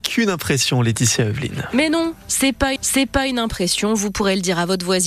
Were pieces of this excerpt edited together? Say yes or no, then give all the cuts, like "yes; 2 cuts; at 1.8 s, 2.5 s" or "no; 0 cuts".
yes; 1 cut; at 2.8 s